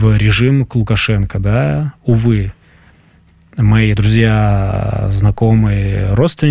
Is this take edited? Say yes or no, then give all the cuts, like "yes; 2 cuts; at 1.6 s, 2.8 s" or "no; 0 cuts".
yes; 1 cut; at 4.0 s